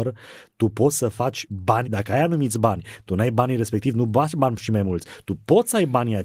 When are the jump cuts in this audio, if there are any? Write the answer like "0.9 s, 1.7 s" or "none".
1.5 s, 1.8 s